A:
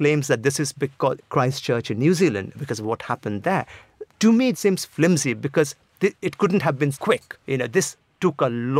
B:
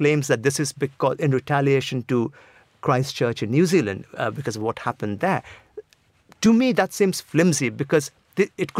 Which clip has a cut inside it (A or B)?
A